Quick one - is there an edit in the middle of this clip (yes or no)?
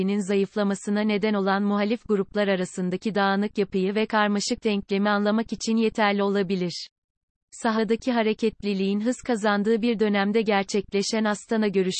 no